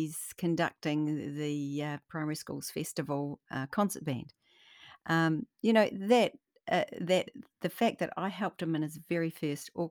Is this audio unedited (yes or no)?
yes